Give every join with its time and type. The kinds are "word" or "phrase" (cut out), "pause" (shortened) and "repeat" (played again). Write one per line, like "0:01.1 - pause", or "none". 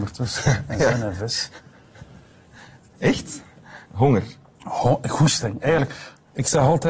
0:03.8 - pause